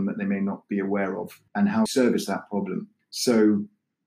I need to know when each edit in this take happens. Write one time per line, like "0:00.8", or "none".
0:01.5
0:01.9
0:03.0